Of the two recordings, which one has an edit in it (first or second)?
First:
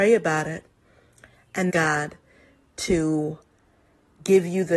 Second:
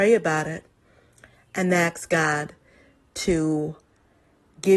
first